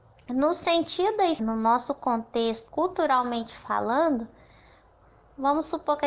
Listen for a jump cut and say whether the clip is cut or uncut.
cut